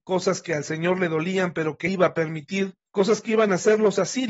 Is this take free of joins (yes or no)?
no